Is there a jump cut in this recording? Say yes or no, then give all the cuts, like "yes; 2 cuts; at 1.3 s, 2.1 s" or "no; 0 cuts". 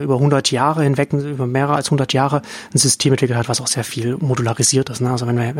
no; 0 cuts